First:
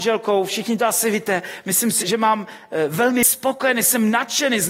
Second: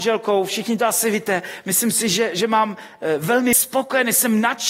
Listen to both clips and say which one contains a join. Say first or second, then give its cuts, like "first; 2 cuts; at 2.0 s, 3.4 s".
first; 1 cut; at 2.0 s